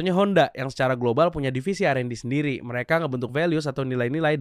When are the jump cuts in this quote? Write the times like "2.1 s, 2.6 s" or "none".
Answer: none